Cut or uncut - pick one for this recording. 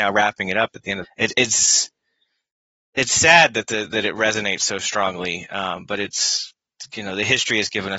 cut